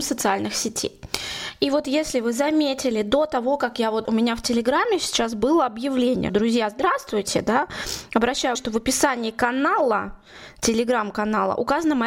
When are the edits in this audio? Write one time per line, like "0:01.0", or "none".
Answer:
0:04.0
0:06.3
0:08.5